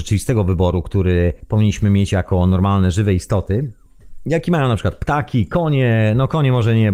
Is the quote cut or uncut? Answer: uncut